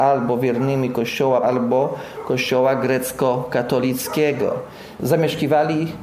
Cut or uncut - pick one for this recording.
cut